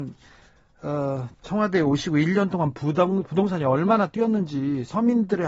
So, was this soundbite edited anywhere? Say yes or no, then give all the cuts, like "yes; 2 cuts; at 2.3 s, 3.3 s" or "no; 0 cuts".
yes; 1 cut; at 1.3 s